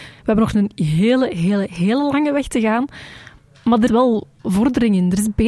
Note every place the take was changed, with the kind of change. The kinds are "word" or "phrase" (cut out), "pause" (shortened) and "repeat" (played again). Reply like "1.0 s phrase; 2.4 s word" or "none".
3.9 s word